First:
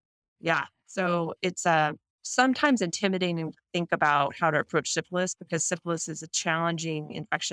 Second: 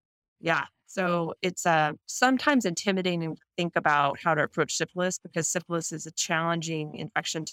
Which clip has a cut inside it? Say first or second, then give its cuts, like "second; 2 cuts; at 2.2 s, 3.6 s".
second; 1 cut; at 2.0 s